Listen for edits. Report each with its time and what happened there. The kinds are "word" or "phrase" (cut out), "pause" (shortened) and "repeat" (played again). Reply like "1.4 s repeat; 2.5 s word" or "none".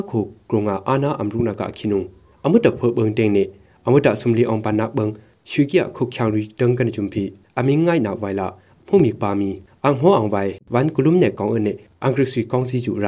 none